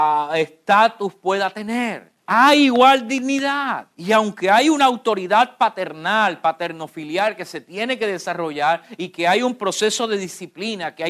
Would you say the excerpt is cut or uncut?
cut